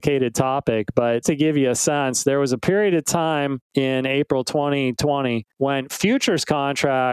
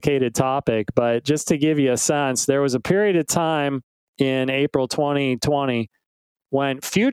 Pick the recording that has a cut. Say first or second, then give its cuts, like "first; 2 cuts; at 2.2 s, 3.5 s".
first; 3 cuts; at 1.2 s, 3.7 s, 5.5 s